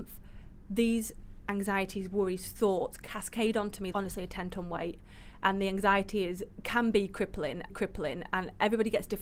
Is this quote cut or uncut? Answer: cut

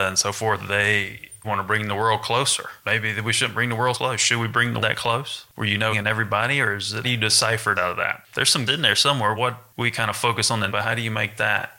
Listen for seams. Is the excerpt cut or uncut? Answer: cut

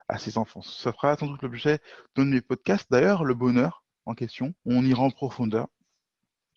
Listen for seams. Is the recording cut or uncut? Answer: cut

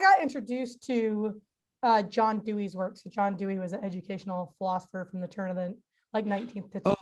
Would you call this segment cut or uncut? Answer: uncut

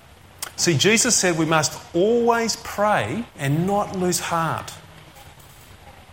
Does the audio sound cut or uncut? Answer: cut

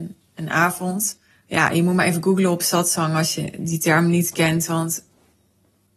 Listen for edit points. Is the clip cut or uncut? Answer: cut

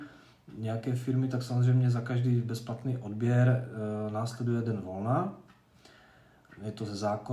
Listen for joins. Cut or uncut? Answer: uncut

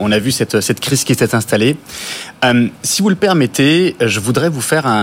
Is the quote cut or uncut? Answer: uncut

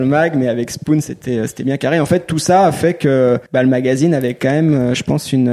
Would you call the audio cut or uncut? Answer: cut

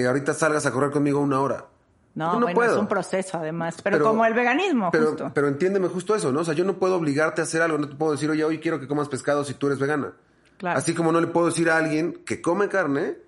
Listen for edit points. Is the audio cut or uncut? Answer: uncut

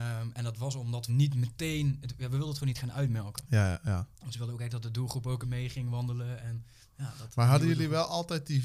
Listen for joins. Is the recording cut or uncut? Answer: cut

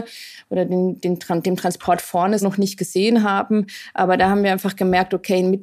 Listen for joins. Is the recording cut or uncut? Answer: cut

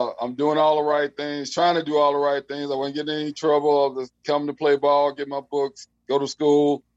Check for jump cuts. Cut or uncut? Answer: uncut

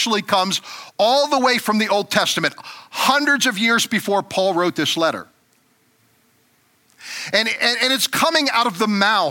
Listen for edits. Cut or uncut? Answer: uncut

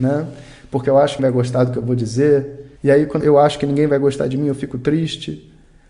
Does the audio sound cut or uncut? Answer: cut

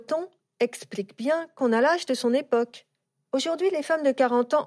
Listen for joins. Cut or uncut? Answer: uncut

